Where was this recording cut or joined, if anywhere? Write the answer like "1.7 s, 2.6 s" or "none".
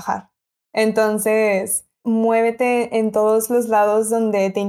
2.0 s